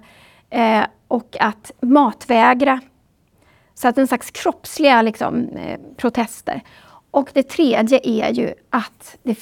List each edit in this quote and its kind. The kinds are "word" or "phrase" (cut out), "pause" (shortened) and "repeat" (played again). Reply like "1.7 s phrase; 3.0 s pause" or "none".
none

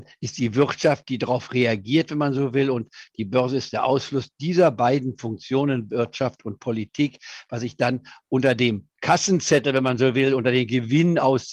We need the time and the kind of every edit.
none

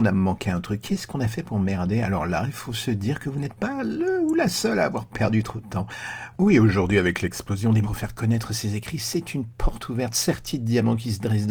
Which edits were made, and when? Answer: 7.8 s word

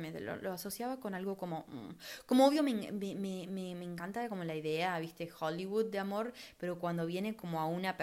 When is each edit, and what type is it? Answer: none

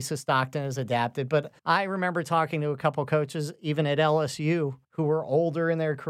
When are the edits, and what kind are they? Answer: 1.6 s pause; 4.8 s pause

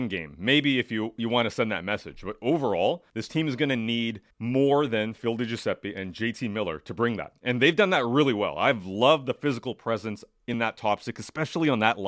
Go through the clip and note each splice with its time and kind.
3.1 s pause; 4.3 s pause

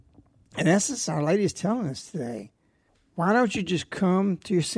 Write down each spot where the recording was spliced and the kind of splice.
none

